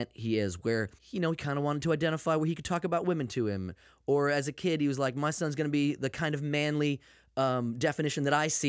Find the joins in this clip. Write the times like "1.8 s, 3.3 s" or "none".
1.0 s